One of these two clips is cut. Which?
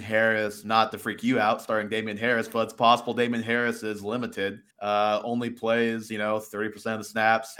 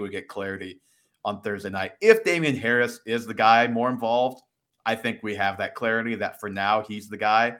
first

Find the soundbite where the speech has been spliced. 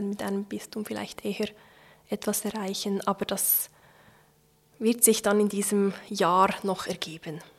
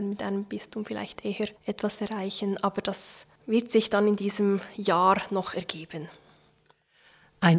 second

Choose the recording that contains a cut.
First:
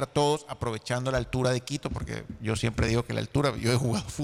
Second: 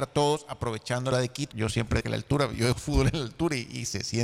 second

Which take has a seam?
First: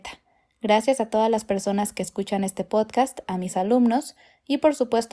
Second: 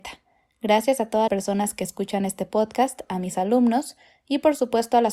second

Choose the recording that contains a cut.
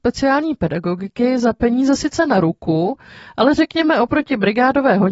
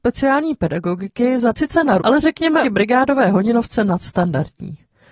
second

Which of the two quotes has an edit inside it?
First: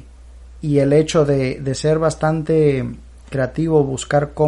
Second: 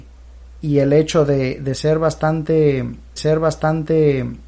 second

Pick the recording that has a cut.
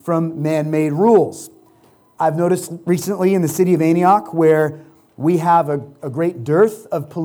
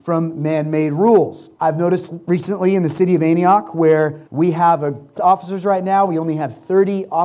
second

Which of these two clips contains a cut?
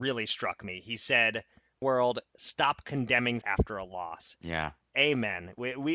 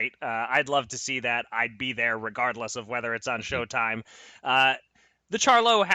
first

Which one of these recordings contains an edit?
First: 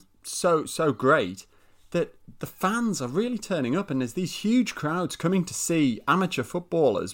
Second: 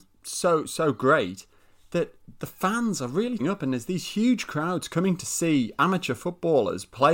second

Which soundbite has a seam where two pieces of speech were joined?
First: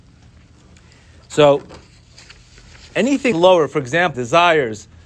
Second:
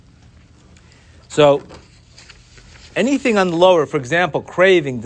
first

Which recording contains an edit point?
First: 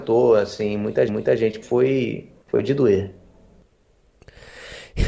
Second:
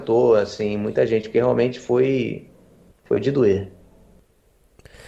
first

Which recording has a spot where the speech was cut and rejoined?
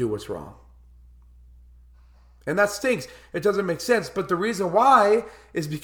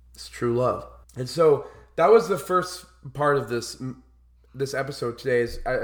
second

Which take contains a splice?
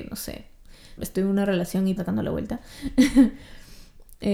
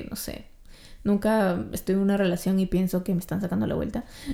first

